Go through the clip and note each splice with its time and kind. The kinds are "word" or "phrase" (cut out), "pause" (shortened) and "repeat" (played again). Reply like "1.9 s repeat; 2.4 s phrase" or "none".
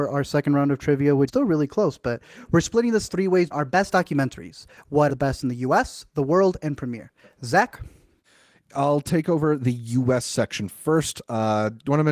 1.3 s word; 3.5 s word; 5.1 s word